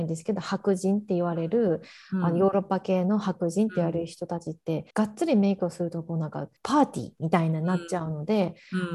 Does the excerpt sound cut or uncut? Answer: cut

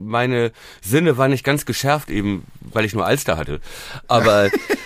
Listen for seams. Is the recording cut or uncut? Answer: uncut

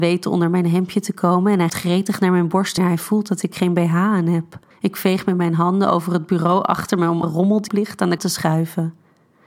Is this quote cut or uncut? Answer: cut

